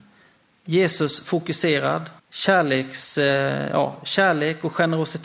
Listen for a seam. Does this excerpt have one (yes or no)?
yes